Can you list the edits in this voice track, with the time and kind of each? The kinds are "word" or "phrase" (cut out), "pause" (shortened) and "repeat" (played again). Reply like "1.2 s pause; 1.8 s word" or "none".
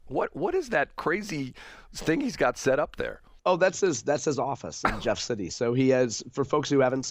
3.4 s pause